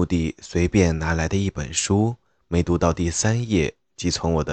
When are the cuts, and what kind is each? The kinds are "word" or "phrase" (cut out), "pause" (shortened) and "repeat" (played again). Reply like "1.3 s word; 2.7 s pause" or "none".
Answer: none